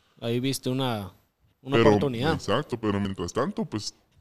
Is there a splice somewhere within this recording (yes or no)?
no